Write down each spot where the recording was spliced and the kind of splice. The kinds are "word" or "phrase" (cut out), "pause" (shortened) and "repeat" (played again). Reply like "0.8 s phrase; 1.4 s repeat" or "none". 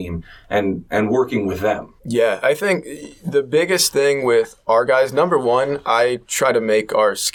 2.0 s pause